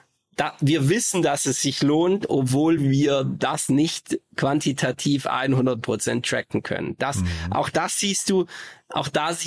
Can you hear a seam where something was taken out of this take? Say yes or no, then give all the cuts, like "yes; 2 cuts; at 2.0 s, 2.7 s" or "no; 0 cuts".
no; 0 cuts